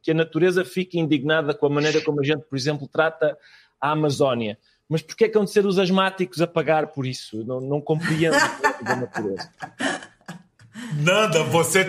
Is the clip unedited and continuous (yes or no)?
yes